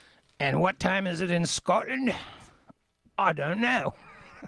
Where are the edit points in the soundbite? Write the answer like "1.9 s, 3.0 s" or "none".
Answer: none